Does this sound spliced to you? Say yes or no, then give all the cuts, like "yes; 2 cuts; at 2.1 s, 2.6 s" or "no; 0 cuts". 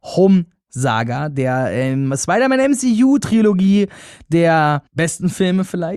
no; 0 cuts